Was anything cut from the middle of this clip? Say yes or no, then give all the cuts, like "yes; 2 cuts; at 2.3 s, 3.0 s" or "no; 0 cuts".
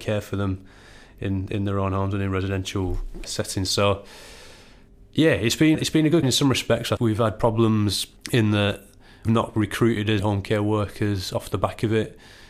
yes; 8 cuts; at 3.2 s, 4.9 s, 5.7 s, 6.2 s, 7.0 s, 8.2 s, 9.3 s, 10.2 s